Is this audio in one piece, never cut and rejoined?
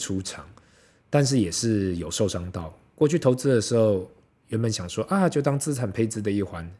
yes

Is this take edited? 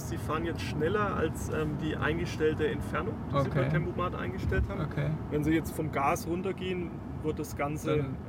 no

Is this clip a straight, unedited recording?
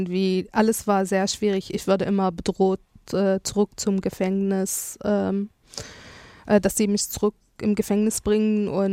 yes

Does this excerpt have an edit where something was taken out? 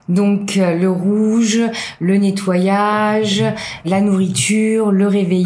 yes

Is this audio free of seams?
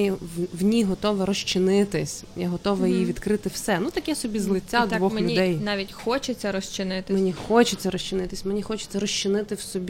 yes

